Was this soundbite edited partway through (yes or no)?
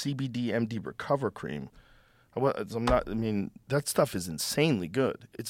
no